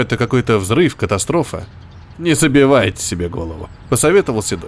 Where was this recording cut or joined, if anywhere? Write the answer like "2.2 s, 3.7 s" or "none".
none